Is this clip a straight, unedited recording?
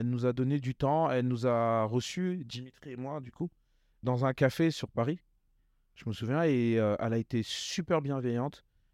no; 1 cut; at 4.0 s

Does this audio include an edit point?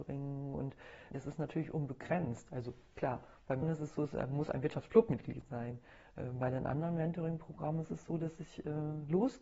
yes; 2 cuts; at 1.1 s, 3.6 s

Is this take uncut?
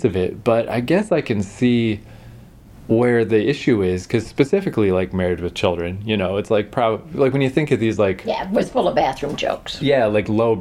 yes; 0 cuts

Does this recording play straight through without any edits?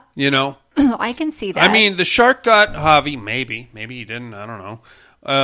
yes; 0 cuts

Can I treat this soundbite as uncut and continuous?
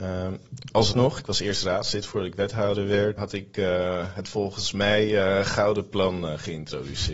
no; 2 cuts; at 0.9 s, 3.2 s

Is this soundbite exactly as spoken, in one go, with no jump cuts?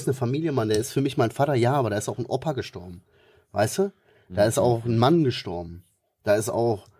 yes; 0 cuts

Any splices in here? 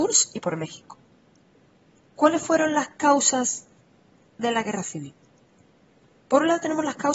no; 0 cuts

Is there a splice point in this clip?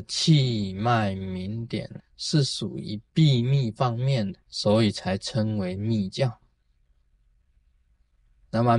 yes; 2 cuts; at 2.0 s, 4.4 s

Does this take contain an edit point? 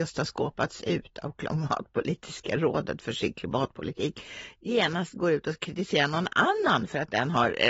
no; 0 cuts

